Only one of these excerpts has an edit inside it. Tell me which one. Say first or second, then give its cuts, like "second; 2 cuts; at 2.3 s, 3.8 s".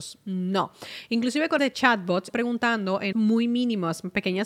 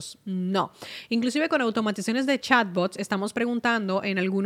first; 3 cuts; at 1.6 s, 2.3 s, 3.1 s